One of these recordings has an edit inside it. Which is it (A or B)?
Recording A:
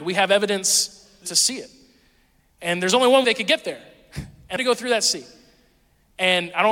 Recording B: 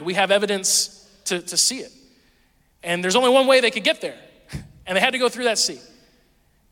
A